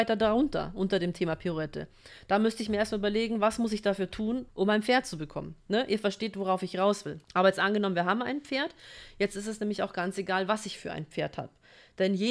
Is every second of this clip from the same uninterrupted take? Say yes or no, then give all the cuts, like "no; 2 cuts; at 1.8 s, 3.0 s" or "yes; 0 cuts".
no; 3 cuts; at 4.5 s, 5.6 s, 7.2 s